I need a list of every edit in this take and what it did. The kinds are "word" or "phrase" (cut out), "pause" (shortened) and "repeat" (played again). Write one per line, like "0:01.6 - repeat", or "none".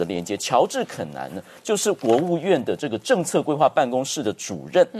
none